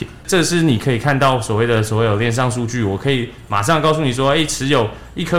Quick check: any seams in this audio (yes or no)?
no